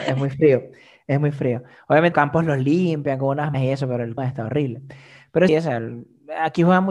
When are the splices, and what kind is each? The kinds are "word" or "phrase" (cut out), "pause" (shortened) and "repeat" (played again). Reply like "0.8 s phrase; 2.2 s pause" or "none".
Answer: 2.1 s word; 3.5 s word; 4.2 s word; 5.5 s word